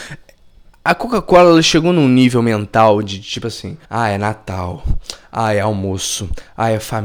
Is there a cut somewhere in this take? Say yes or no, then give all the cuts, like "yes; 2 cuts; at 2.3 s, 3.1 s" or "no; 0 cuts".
yes; 1 cut; at 3.8 s